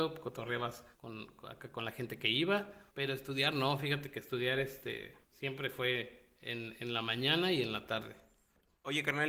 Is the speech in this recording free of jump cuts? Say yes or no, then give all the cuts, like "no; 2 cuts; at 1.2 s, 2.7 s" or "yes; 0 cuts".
no; 3 cuts; at 0.9 s, 2.9 s, 5.2 s